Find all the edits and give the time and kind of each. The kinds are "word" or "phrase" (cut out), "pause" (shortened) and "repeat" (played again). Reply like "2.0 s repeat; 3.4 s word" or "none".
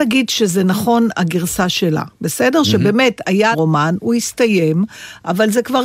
3.5 s word